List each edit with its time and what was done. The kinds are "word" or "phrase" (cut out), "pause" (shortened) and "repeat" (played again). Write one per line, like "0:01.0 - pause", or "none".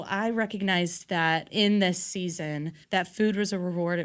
0:01.5 - word
0:02.8 - pause

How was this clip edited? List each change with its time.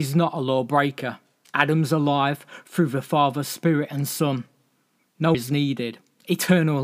0:01.4 - pause
0:05.3 - word

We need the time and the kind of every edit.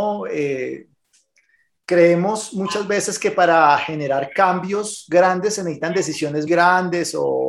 0:06.5 - word

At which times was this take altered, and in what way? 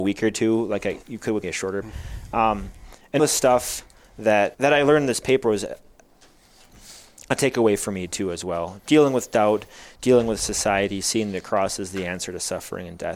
0:01.0 - word
0:01.4 - word
0:01.8 - word
0:03.2 - word
0:04.5 - word
0:08.8 - word

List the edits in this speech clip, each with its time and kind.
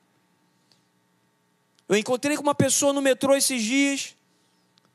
none

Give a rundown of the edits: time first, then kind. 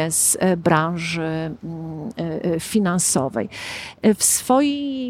none

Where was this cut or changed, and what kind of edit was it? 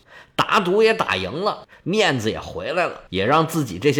0:03.1 - pause

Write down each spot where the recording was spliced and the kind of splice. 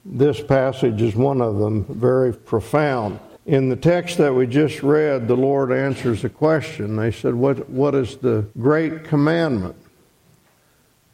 0:02.3 - phrase
0:03.4 - pause
0:08.5 - pause

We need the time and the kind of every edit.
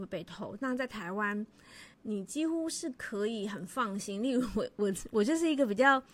0:01.9 - pause

